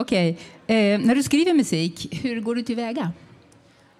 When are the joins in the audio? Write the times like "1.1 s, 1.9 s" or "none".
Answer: 2.2 s